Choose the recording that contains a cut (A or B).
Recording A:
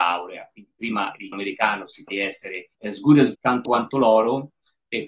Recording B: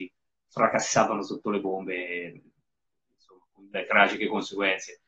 A